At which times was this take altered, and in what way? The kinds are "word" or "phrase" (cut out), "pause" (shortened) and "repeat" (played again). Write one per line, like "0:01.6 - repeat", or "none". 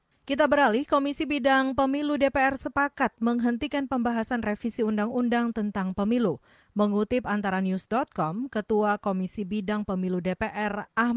none